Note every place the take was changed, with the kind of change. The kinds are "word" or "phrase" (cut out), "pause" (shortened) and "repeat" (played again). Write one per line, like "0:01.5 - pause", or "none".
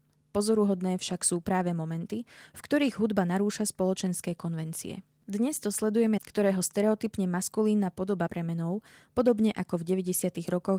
0:06.2 - phrase
0:08.3 - word